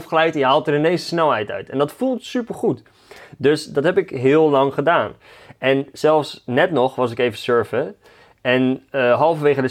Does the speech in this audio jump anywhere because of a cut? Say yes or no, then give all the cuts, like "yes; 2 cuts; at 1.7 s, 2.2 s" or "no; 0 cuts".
no; 0 cuts